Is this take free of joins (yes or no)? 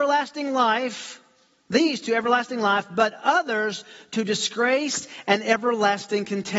yes